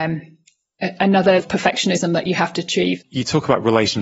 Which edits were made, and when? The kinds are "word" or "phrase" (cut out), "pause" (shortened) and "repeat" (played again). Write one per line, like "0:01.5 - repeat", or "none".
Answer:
0:01.4 - word